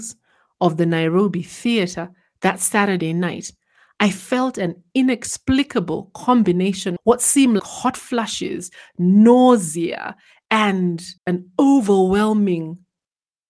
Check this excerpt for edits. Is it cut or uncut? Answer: cut